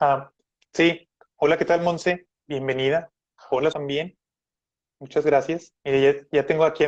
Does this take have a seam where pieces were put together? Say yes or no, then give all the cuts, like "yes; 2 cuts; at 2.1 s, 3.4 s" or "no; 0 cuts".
yes; 3 cuts; at 1.3 s, 3.7 s, 5.8 s